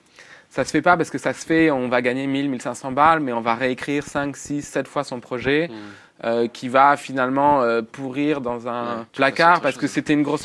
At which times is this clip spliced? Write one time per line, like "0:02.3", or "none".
0:09.1